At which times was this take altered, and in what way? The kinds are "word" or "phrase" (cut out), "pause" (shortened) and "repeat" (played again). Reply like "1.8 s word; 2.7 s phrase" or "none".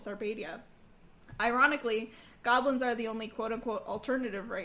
none